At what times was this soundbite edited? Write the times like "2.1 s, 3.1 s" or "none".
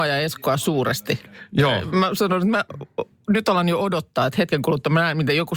none